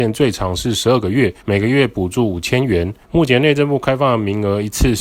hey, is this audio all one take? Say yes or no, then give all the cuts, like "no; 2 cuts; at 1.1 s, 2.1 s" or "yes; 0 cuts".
no; 2 cuts; at 1.4 s, 3.0 s